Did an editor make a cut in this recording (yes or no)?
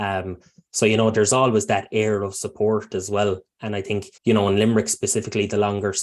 yes